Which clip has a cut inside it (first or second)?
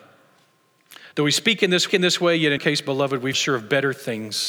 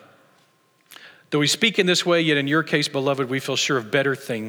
first